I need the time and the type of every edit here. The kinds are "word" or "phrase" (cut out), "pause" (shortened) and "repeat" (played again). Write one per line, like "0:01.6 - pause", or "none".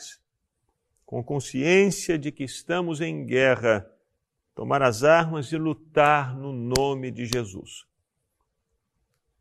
none